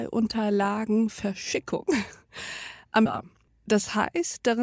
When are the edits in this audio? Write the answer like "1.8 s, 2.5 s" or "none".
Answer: 3.1 s, 3.5 s